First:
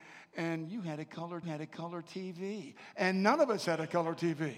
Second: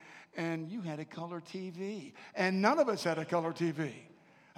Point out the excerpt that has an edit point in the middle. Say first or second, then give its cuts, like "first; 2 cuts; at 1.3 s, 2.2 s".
first; 1 cut; at 1.4 s